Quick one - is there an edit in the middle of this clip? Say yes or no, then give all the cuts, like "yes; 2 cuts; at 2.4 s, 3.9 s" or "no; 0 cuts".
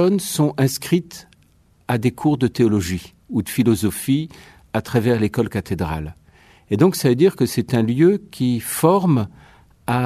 no; 0 cuts